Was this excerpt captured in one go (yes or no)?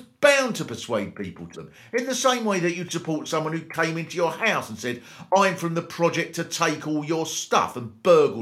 no